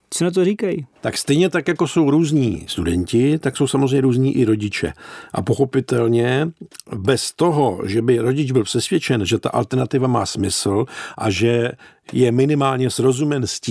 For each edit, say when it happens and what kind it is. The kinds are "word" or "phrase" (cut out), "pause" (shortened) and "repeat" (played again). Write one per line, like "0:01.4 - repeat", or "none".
0:00.9 - pause